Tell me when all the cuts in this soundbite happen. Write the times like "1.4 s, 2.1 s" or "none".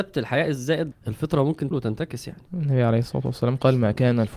0.9 s, 1.7 s, 2.5 s